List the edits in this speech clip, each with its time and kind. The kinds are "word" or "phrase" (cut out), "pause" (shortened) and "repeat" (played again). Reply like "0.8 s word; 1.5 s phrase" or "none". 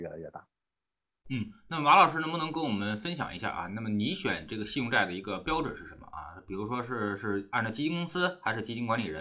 none